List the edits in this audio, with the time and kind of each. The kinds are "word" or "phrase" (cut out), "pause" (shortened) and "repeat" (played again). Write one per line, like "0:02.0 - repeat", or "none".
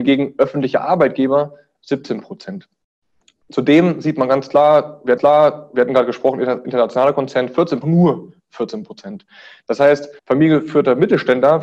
0:05.2 - repeat
0:07.8 - phrase
0:10.2 - pause